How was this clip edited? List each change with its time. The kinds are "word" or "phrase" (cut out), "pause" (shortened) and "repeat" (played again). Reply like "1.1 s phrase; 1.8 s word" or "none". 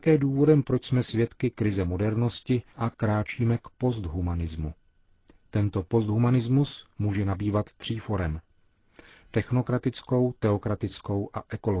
2.7 s pause